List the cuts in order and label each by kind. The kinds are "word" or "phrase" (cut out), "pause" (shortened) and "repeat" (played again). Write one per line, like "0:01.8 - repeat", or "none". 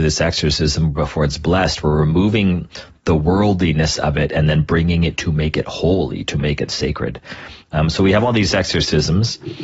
none